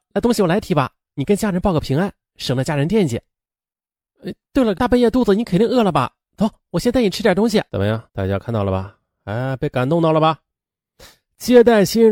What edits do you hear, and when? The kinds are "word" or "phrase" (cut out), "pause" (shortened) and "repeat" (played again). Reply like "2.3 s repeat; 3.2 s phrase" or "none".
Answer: 4.7 s word; 7.7 s pause; 8.1 s pause